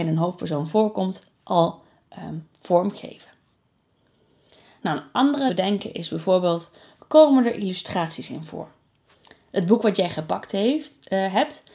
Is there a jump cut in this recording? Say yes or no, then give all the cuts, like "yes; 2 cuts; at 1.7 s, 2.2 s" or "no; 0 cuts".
yes; 1 cut; at 5.5 s